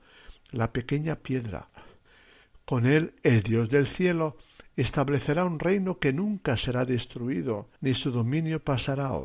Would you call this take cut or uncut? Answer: cut